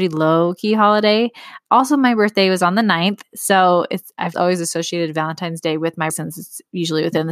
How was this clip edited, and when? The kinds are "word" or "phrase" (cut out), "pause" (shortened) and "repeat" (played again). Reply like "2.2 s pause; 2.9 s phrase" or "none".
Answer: 4.3 s word; 6.1 s word